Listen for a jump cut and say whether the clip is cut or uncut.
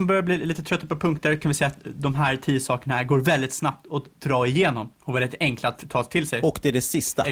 uncut